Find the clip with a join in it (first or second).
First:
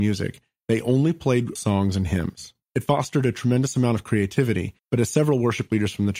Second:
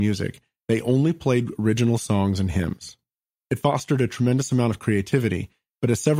first